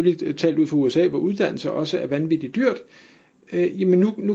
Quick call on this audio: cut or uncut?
uncut